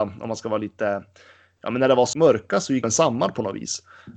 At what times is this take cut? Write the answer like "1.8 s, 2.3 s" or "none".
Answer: 2.1 s, 2.8 s